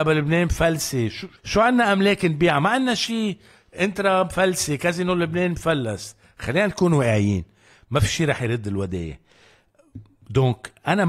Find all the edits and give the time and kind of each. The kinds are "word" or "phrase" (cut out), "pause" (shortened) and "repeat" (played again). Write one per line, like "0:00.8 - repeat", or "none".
0:01.4 - pause